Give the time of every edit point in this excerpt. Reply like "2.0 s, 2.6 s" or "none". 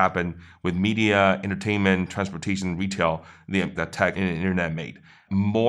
3.7 s, 4.1 s